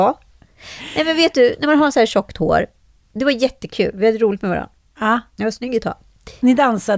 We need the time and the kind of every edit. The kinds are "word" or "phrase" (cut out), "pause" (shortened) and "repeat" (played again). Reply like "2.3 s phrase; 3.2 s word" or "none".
none